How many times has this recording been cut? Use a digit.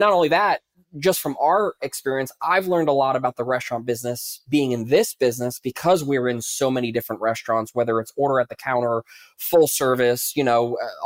0